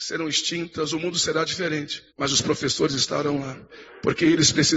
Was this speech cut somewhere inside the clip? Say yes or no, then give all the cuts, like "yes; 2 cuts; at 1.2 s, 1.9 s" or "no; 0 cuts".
yes; 1 cut; at 2.1 s